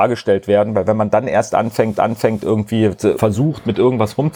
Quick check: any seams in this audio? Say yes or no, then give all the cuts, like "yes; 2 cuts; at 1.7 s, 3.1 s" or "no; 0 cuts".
yes; 2 cuts; at 2.0 s, 3.2 s